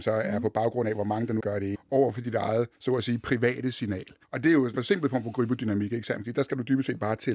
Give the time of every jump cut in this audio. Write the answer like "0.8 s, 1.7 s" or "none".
1.4 s, 1.7 s, 2.7 s, 4.2 s, 4.7 s